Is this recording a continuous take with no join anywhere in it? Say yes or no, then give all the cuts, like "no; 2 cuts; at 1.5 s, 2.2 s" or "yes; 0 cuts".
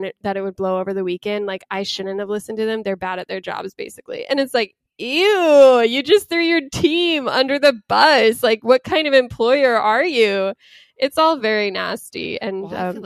yes; 0 cuts